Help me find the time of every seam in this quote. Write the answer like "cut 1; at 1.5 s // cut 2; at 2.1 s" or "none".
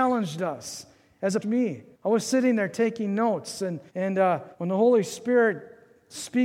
cut 1; at 1.4 s // cut 2; at 1.9 s // cut 3; at 3.9 s // cut 4; at 4.5 s